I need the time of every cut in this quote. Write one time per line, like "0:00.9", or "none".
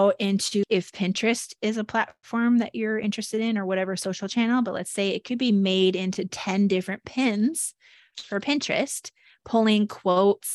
none